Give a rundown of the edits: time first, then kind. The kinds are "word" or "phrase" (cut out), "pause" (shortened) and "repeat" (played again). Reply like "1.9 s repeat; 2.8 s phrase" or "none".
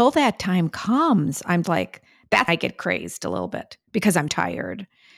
1.6 s word; 2.5 s word; 4.3 s word